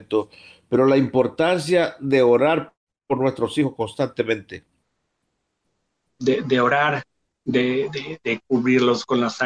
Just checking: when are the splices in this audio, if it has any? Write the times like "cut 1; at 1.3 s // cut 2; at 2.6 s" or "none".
none